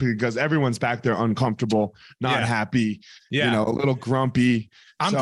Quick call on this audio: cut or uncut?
uncut